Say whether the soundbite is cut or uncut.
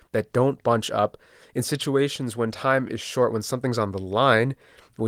uncut